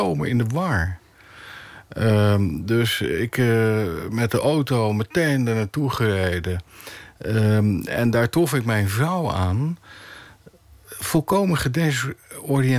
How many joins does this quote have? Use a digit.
0